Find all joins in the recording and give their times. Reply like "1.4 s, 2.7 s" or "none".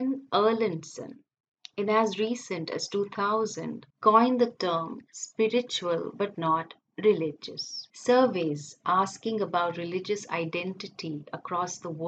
3.9 s, 7.9 s